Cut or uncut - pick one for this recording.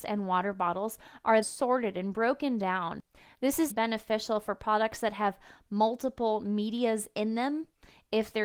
cut